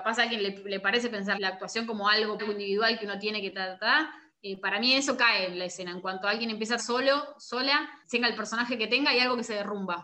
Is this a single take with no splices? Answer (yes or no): no